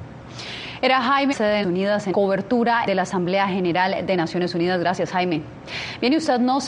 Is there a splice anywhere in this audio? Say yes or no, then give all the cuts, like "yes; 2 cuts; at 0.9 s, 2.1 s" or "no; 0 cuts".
yes; 4 cuts; at 1.3 s, 1.6 s, 2.1 s, 2.9 s